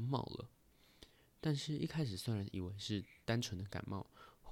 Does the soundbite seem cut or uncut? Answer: uncut